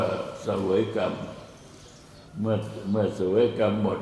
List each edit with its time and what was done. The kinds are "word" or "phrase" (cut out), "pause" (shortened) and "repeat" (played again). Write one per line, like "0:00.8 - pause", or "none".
0:02.3 - pause